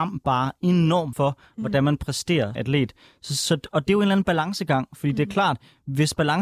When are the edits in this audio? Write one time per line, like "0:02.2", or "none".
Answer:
0:01.1
0:02.5